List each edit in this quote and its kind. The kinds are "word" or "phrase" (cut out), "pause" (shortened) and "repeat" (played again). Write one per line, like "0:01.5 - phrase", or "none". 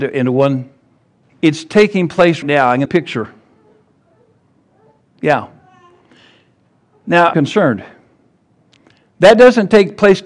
0:01.2 - pause
0:02.4 - word
0:02.9 - phrase
0:07.3 - phrase